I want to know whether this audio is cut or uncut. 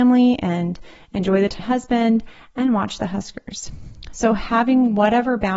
cut